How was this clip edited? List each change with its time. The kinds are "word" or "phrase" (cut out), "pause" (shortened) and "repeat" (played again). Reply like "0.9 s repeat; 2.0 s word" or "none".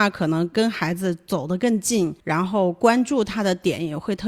2.2 s pause